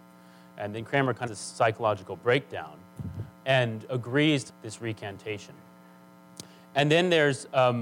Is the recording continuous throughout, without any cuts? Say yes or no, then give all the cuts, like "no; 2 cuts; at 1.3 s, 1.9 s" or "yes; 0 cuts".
no; 3 cuts; at 1.3 s, 3.4 s, 4.5 s